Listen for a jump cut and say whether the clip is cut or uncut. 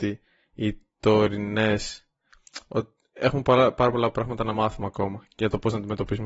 uncut